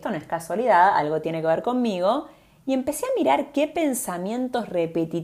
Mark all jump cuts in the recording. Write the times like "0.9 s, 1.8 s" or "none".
none